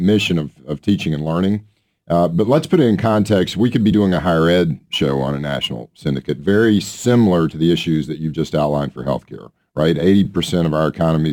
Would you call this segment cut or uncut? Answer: uncut